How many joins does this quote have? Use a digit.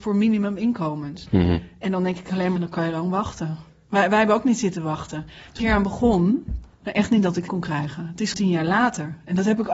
4